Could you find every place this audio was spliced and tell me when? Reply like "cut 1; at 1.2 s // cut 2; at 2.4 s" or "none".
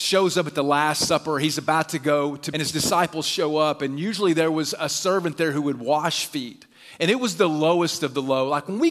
cut 1; at 2.5 s